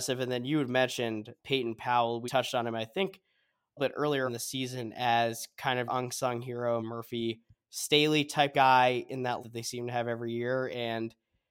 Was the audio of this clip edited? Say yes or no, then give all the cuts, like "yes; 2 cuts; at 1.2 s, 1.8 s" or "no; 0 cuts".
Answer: yes; 8 cuts; at 1.4 s, 2.3 s, 3.8 s, 4.3 s, 5.9 s, 6.8 s, 8.5 s, 9.4 s